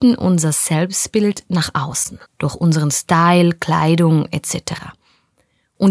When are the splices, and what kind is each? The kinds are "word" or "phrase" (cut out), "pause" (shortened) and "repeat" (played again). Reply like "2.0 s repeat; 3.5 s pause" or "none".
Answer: 2.3 s pause